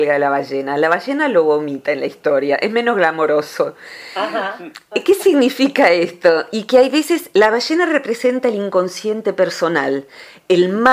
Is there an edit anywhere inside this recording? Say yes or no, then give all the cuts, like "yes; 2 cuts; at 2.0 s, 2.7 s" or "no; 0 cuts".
no; 0 cuts